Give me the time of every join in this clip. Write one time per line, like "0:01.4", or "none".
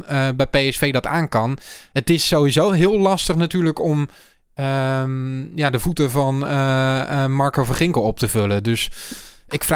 none